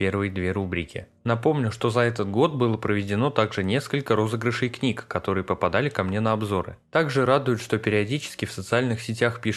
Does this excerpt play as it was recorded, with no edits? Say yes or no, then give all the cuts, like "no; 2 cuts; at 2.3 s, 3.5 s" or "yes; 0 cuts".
yes; 0 cuts